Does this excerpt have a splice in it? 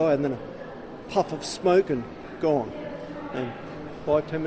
no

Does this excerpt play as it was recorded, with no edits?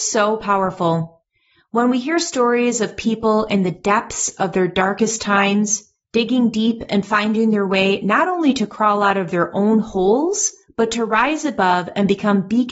yes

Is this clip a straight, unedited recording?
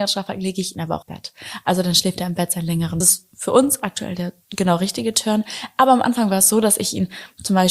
no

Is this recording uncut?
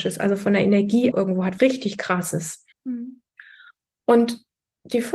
no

